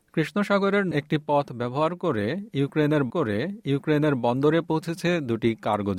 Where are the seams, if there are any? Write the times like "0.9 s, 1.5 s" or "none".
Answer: 0.9 s, 3.1 s